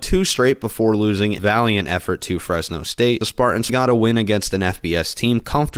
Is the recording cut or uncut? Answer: cut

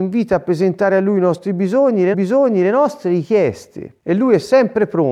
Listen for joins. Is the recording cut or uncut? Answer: cut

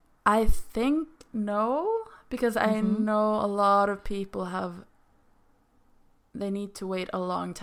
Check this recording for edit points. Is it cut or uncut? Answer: uncut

